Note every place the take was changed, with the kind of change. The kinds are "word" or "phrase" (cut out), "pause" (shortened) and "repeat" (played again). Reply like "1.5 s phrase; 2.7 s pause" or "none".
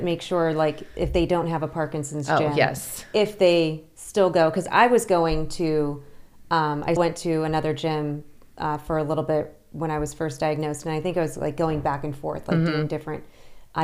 7.0 s word